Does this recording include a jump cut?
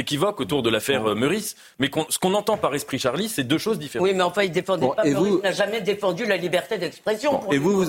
yes; 1 cut; at 2.1 s

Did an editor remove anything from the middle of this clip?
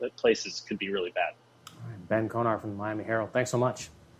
no; 0 cuts

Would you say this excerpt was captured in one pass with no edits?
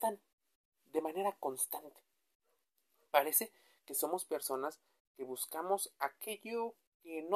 yes; 0 cuts

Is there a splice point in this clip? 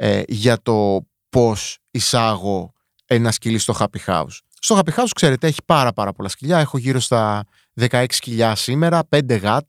no; 0 cuts

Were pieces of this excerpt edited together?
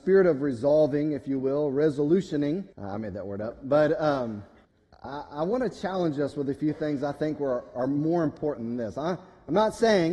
yes; 2 cuts; at 2.7 s, 4.6 s

